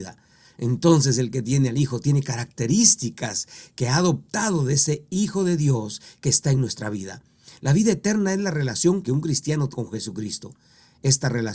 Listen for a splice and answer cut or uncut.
cut